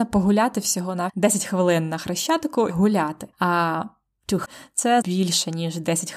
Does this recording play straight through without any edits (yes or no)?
no